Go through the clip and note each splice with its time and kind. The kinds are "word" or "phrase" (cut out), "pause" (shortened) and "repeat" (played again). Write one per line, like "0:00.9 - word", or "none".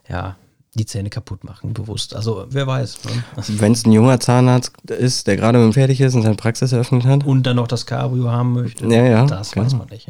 0:02.5 - word
0:05.7 - word